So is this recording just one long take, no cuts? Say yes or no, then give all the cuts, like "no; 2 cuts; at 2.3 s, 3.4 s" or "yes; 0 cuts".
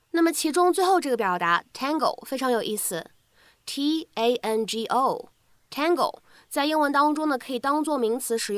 yes; 0 cuts